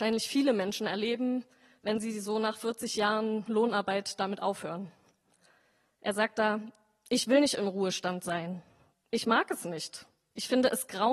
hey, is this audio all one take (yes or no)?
yes